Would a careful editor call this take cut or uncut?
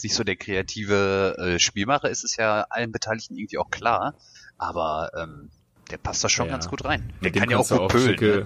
cut